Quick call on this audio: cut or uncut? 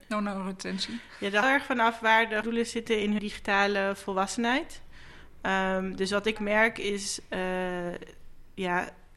cut